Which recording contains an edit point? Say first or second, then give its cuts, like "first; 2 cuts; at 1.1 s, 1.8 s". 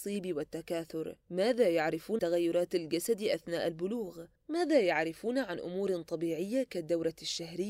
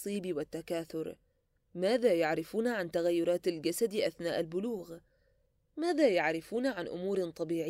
first; 3 cuts; at 1.2 s, 2.2 s, 4.4 s